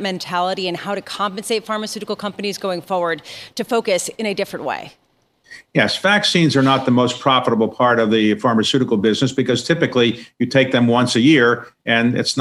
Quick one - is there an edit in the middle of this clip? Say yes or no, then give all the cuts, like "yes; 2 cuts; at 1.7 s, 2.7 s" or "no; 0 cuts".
no; 0 cuts